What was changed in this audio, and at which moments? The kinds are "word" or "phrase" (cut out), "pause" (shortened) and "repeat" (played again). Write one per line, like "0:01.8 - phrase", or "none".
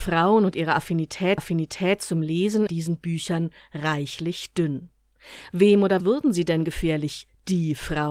0:01.4 - repeat
0:02.7 - word
0:06.0 - word